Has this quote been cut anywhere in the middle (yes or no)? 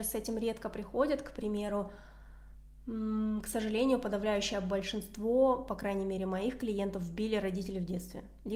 no